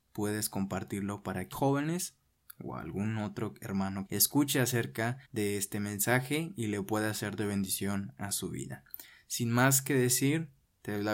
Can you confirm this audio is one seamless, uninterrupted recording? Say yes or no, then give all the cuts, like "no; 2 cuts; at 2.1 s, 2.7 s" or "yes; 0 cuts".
no; 3 cuts; at 1.5 s, 4.1 s, 5.2 s